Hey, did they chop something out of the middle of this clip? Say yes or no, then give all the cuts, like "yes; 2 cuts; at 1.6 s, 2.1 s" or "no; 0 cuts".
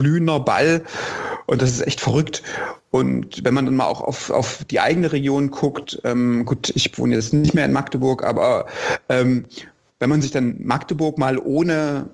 no; 0 cuts